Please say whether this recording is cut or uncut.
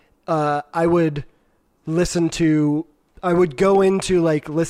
uncut